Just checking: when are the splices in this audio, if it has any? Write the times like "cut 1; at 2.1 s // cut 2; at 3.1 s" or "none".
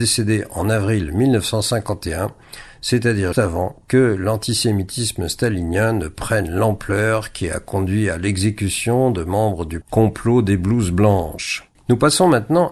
cut 1; at 3.3 s // cut 2; at 9.8 s